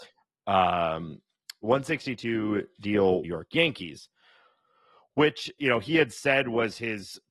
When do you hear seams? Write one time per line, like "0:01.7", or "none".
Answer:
0:03.2